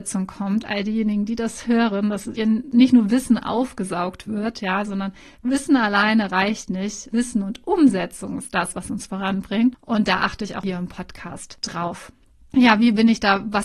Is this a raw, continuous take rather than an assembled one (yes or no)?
yes